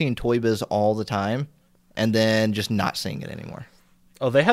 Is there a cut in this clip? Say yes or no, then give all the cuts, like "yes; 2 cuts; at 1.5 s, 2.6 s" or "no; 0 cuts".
no; 0 cuts